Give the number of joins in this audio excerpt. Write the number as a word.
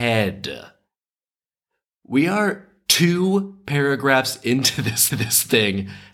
one